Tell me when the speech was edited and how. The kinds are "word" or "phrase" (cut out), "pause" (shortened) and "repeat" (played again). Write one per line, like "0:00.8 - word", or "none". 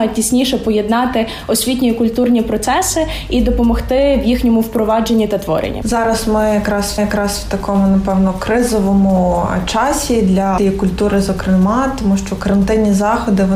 0:07.0 - repeat
0:10.6 - word